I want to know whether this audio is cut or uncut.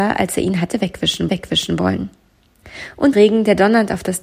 cut